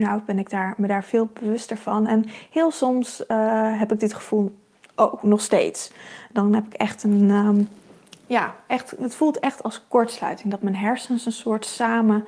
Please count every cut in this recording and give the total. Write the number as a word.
zero